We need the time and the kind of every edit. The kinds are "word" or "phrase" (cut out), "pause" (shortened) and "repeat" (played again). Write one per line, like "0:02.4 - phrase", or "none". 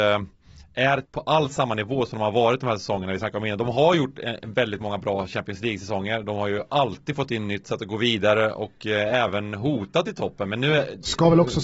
0:01.1 - pause
0:07.6 - phrase